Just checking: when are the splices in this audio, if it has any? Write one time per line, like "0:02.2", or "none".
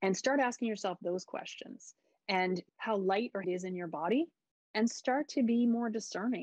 0:02.7
0:03.4